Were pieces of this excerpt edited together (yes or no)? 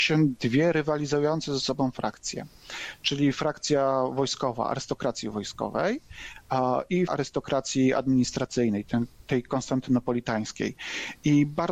yes